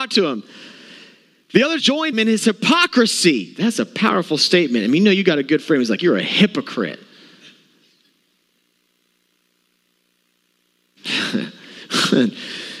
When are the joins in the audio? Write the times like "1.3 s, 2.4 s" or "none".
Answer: 1.8 s, 2.1 s